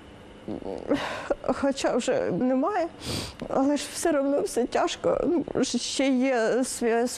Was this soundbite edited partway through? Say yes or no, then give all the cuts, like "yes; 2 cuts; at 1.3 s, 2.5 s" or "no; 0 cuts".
yes; 1 cut; at 2.4 s